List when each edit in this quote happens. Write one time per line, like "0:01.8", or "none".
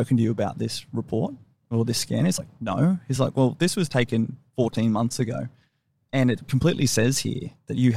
none